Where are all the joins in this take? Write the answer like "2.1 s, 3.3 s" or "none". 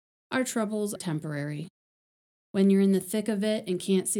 1.0 s